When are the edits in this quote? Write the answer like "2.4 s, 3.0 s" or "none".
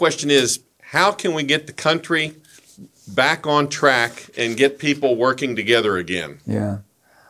none